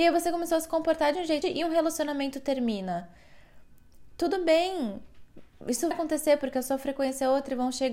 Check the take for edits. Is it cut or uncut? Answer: cut